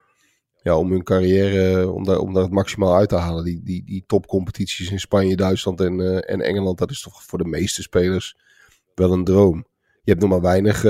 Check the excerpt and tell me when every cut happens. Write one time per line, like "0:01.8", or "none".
none